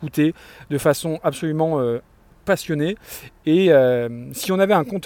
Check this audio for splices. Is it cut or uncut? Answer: uncut